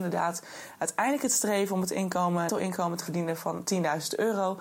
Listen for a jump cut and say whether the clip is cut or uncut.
cut